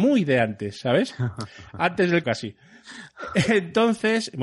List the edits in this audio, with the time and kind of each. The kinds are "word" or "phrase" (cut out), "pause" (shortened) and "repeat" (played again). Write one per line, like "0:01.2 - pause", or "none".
0:02.2 - word